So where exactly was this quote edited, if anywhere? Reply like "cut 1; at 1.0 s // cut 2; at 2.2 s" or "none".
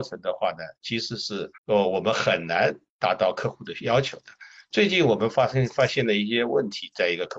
cut 1; at 1.6 s